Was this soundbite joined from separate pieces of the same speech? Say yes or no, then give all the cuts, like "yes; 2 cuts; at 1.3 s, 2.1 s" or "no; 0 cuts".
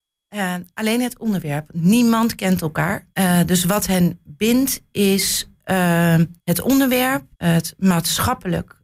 yes; 3 cuts; at 3.1 s, 6.4 s, 7.3 s